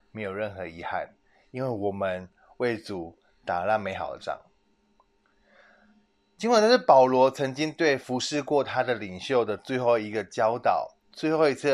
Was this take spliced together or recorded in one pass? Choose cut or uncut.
uncut